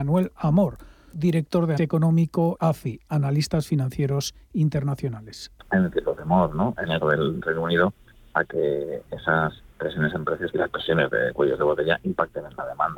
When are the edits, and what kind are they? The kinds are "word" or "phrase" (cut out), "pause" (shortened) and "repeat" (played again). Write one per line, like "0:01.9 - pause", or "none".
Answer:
0:01.1 - word
0:01.8 - word
0:02.6 - phrase
0:07.0 - word
0:09.6 - pause
0:10.5 - phrase

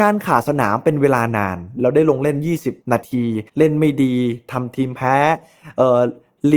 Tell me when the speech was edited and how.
0:02.8 - pause
0:03.5 - pause

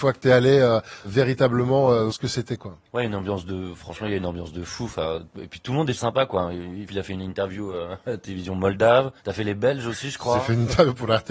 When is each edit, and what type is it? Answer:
0:02.1 - word
0:05.9 - word
0:06.9 - word
0:09.2 - pause

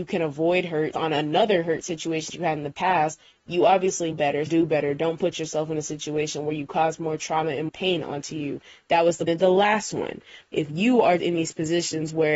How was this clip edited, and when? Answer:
0:00.9 - word
0:02.3 - word
0:04.1 - word
0:04.5 - word
0:07.7 - word
0:09.3 - word
0:10.5 - word
0:11.2 - word

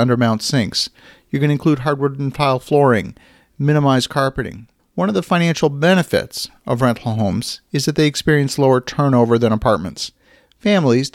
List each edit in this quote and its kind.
none

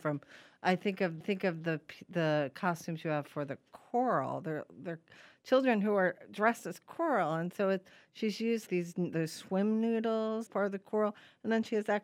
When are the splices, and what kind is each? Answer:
0:01.2 - repeat
0:08.7 - word
0:10.5 - word

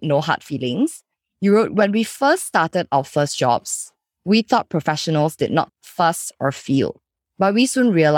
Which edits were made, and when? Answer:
0:05.7 - word

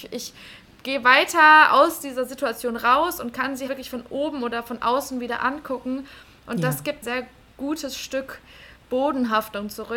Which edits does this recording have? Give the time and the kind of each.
0:03.7 - word
0:07.0 - phrase

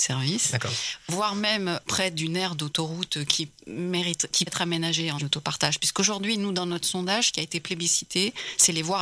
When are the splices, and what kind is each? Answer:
0:01.9 - word
0:04.5 - word
0:05.2 - phrase

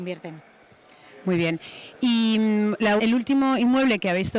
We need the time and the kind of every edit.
0:03.0 - word

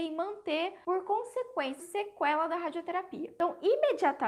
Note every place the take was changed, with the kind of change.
0:01.8 - word

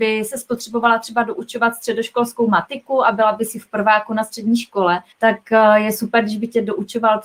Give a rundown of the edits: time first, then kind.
0:05.1 - pause

